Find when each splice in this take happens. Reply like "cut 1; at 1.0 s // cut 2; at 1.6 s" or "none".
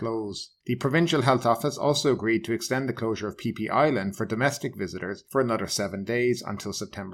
none